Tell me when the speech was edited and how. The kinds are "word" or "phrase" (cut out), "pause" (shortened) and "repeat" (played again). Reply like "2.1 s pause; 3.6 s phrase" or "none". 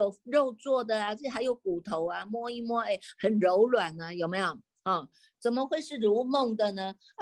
none